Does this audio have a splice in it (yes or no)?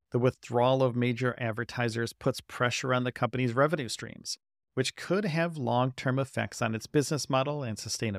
no